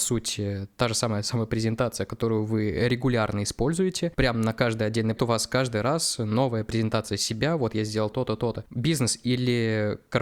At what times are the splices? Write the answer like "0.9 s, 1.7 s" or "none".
5.2 s, 8.1 s